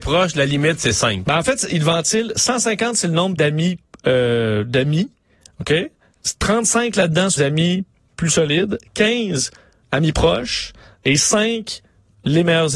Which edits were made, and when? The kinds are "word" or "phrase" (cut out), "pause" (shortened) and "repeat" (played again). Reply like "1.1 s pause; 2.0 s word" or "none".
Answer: 3.4 s word; 7.4 s word